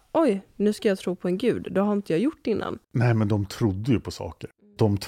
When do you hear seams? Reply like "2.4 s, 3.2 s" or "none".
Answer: 2.8 s